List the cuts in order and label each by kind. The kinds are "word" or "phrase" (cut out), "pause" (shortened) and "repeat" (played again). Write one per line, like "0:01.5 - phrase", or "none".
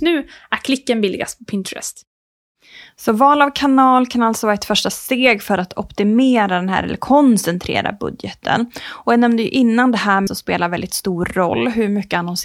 0:10.3 - word